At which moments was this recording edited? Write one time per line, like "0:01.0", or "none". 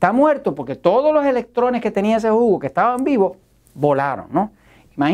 none